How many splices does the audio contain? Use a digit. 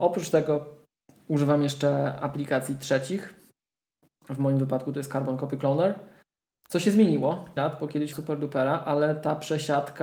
2